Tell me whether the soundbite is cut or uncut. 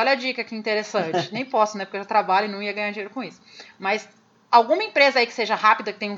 uncut